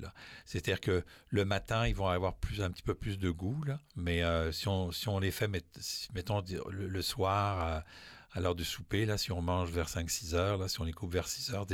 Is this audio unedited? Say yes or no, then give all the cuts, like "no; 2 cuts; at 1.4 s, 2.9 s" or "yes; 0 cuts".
no; 1 cut; at 3.9 s